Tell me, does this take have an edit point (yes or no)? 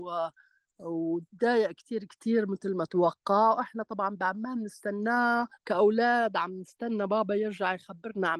yes